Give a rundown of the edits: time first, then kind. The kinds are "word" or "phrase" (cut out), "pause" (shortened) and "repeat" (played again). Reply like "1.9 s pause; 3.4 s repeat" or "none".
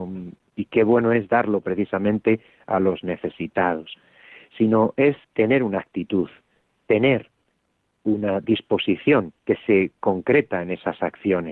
5.2 s pause; 9.4 s pause